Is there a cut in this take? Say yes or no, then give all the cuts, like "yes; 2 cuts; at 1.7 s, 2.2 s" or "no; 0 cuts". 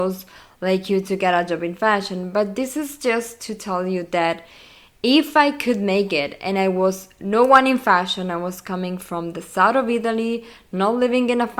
no; 0 cuts